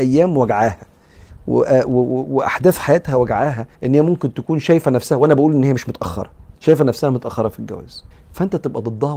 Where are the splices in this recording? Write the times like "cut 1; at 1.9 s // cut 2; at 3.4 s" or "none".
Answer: cut 1; at 3.7 s // cut 2; at 6.6 s // cut 3; at 8.1 s

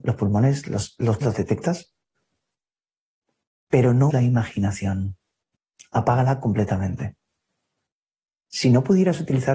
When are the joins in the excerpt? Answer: cut 1; at 1.2 s // cut 2; at 4.1 s // cut 3; at 5.6 s

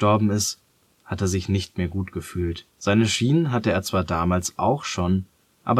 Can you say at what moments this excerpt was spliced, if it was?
cut 1; at 2.7 s

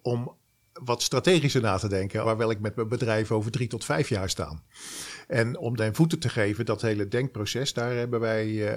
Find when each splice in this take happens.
cut 1; at 2.2 s // cut 2; at 5.8 s

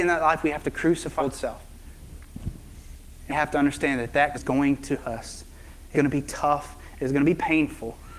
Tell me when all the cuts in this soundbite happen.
cut 1; at 1.2 s // cut 2; at 3.3 s // cut 3; at 4.3 s // cut 4; at 5.0 s // cut 5; at 5.9 s

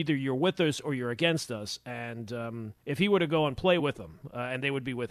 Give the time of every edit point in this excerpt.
cut 1; at 2.8 s // cut 2; at 3.8 s

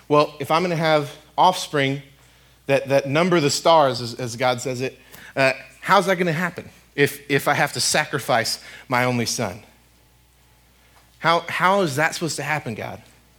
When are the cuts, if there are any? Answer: none

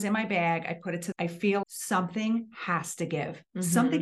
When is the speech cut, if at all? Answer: cut 1; at 1.1 s // cut 2; at 1.6 s

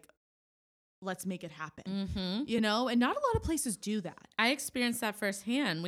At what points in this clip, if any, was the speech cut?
none

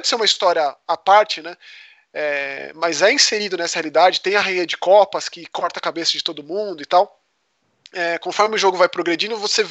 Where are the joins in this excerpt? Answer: none

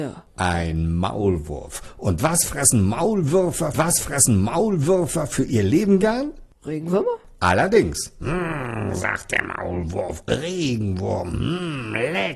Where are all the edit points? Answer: cut 1; at 3.7 s // cut 2; at 10.3 s

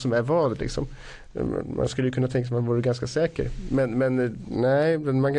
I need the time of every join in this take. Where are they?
none

